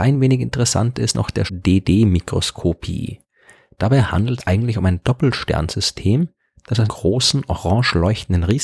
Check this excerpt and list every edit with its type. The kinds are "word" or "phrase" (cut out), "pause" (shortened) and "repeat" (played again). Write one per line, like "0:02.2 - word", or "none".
0:01.1 - word
0:01.5 - word
0:04.4 - word
0:06.9 - word